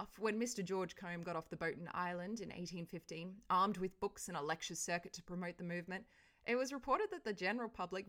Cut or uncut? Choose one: uncut